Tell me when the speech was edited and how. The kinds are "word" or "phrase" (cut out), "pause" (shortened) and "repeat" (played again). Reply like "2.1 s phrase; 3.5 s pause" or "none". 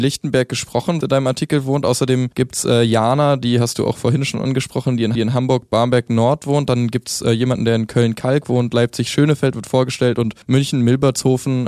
1.0 s phrase; 2.3 s pause; 5.2 s repeat; 10.4 s pause